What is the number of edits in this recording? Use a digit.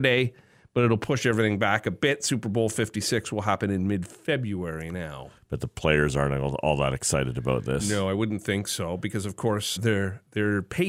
1